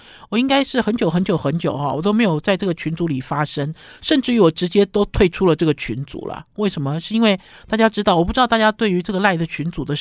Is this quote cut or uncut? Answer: uncut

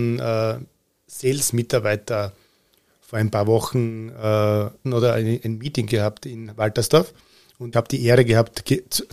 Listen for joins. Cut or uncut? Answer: cut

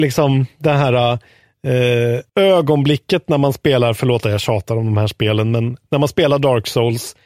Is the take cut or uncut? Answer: cut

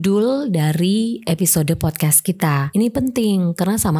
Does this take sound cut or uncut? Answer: uncut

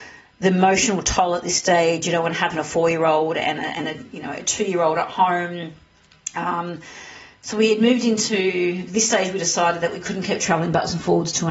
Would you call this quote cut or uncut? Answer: uncut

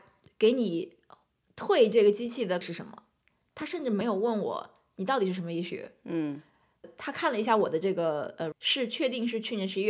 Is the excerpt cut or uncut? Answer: cut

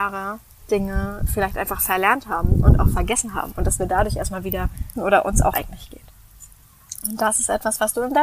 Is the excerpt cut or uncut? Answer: cut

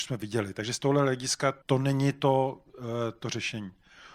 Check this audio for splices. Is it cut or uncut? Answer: cut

